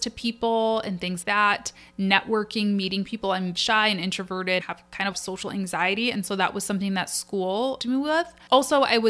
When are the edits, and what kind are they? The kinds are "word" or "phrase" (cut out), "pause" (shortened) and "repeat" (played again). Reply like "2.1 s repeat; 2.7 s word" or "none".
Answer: 1.2 s word; 3.5 s phrase; 4.6 s word; 5.1 s phrase; 7.8 s phrase